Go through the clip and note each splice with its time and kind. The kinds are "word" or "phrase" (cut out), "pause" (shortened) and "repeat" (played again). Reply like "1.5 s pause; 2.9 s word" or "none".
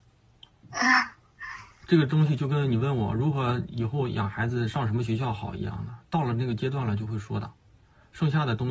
none